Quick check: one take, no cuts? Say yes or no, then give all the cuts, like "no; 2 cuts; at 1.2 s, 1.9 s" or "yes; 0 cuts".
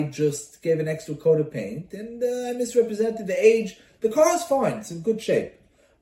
yes; 0 cuts